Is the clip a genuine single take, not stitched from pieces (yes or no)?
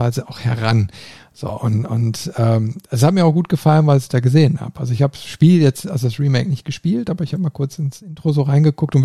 yes